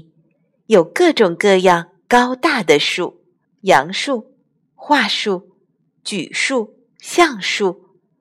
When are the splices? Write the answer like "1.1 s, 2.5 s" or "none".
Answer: 3.4 s